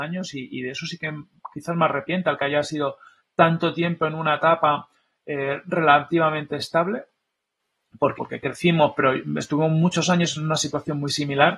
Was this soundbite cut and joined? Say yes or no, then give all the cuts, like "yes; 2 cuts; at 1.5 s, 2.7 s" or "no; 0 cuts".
yes; 1 cut; at 8.2 s